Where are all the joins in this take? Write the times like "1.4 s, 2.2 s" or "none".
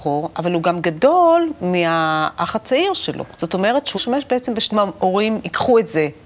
3.3 s, 3.9 s, 4.7 s

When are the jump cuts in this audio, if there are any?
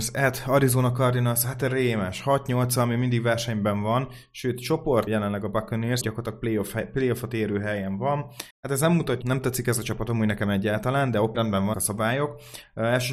5.1 s, 6.0 s, 8.5 s, 9.2 s, 11.3 s, 11.7 s

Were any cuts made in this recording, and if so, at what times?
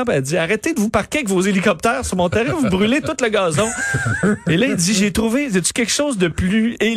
none

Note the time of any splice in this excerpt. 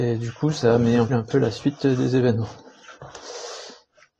1.1 s

